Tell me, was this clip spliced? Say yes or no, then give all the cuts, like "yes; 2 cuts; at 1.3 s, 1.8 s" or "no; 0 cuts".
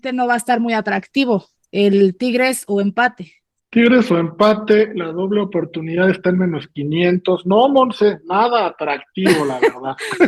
no; 0 cuts